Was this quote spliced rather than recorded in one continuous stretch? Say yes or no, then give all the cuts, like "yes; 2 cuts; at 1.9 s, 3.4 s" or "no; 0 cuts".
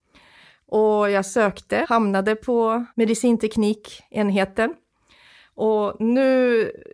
yes; 2 cuts; at 1.8 s, 2.9 s